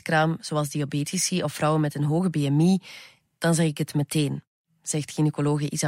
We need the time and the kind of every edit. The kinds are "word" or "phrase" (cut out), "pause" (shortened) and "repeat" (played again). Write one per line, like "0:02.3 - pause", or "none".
none